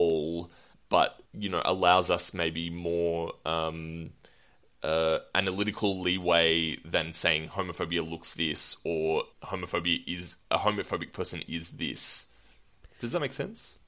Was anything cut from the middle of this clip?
yes; 3 cuts; at 1.3 s, 8.3 s, 9.3 s

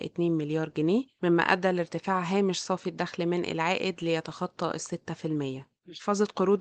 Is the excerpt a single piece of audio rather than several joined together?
yes; 0 cuts

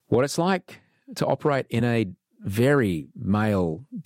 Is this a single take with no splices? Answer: yes; 0 cuts

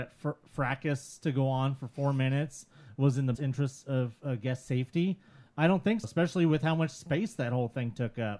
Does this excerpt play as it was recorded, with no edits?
no; 2 cuts; at 3.3 s, 6.0 s

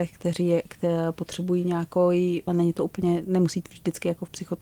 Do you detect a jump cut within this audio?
yes; 2 cuts; at 2.5 s, 3.6 s

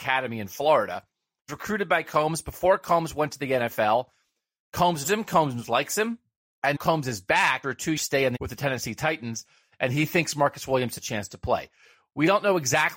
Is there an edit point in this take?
yes; 8 cuts; at 1.5 s, 2.0 s, 5.0 s, 6.7 s, 7.6 s, 8.0 s, 8.3 s, 11.0 s

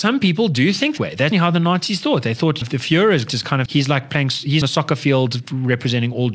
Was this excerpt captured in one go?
no; 6 cuts; at 1.0 s, 1.3 s, 2.6 s, 3.3 s, 3.7 s, 4.6 s

